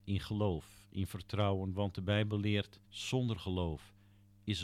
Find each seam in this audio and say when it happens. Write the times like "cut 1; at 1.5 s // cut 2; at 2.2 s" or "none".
cut 1; at 2.8 s